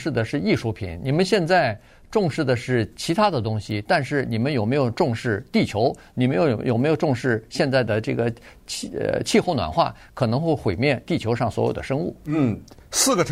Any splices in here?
no; 0 cuts

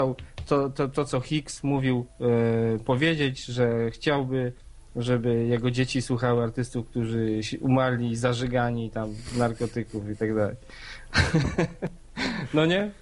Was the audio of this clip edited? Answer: no; 0 cuts

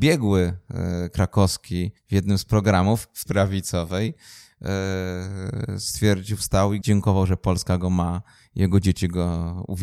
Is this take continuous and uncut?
no; 3 cuts; at 2.0 s, 3.3 s, 6.8 s

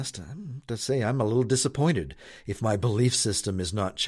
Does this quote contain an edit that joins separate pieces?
no; 0 cuts

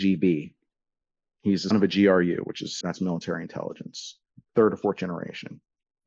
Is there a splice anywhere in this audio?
yes; 3 cuts; at 1.7 s, 2.8 s, 4.5 s

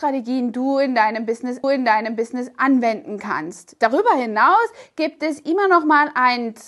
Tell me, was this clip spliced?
yes; 1 cut; at 1.6 s

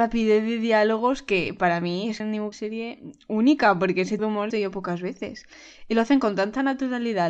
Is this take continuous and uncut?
no; 4 cuts; at 2.2 s, 2.5 s, 4.2 s, 4.5 s

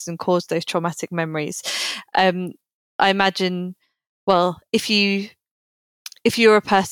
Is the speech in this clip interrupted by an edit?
no; 0 cuts

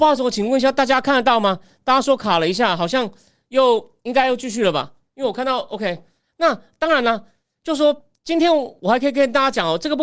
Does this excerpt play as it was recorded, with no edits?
no; 1 cut; at 6.3 s

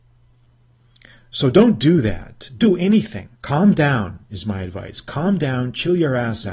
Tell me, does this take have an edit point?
yes; 2 cuts; at 2.6 s, 3.3 s

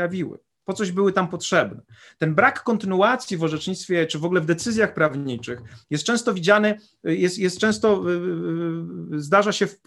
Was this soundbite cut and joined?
no; 0 cuts

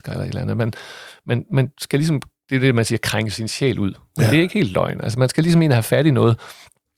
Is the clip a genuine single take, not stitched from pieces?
yes; 0 cuts

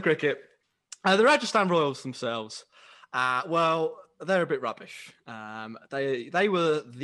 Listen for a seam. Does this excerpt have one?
no; 0 cuts

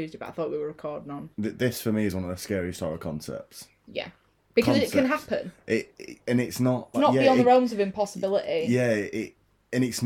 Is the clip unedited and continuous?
no; 2 cuts; at 1.3 s, 6.9 s

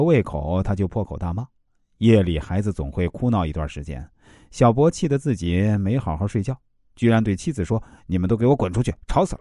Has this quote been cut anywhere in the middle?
no; 0 cuts

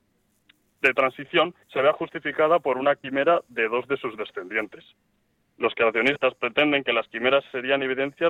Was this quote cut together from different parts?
yes; 1 cut; at 1.6 s

